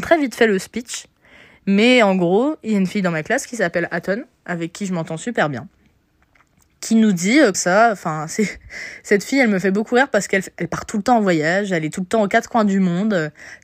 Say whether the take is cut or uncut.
cut